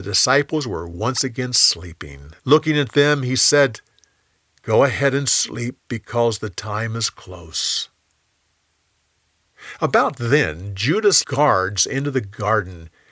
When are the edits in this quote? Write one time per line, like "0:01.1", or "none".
0:02.4
0:05.8
0:11.2